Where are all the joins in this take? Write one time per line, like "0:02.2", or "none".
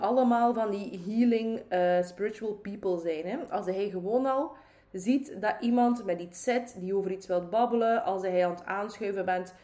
none